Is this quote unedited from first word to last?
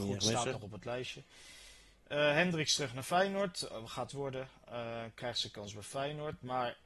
no; 1 cut; at 4.1 s

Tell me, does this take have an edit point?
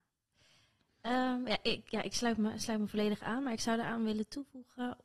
no; 0 cuts

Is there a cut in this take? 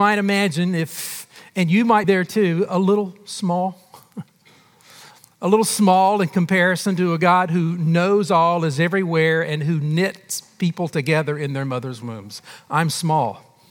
yes; 1 cut; at 2.0 s

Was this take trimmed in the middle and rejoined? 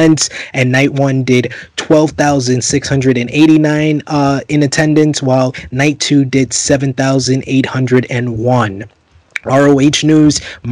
no; 0 cuts

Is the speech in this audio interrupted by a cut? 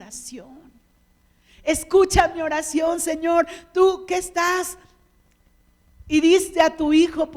no; 0 cuts

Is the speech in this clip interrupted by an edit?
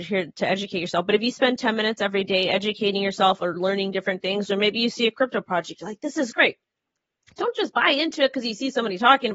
no; 0 cuts

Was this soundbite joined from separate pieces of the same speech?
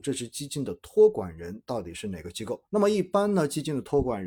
yes; 1 cut; at 2.6 s

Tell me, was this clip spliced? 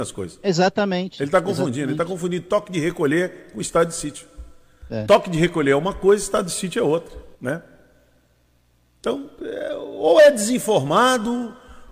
yes; 1 cut; at 7.3 s

